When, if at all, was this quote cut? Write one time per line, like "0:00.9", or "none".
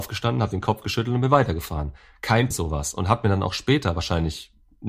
0:02.5